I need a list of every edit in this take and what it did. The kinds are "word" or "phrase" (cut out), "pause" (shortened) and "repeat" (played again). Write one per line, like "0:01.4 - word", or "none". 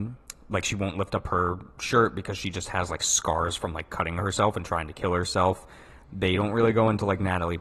none